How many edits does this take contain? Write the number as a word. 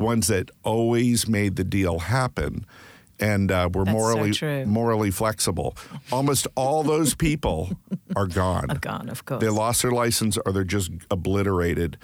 zero